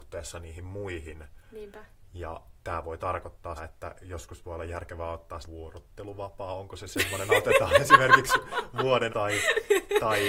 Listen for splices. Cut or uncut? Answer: cut